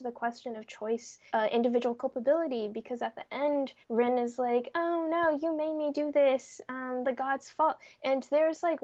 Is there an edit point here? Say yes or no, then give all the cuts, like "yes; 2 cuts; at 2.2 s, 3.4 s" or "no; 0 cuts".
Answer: yes; 3 cuts; at 1.3 s, 3.8 s, 7.0 s